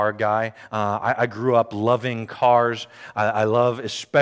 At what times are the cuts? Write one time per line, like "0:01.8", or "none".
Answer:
none